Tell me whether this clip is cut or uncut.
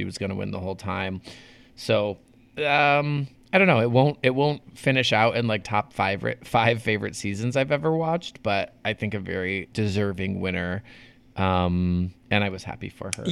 cut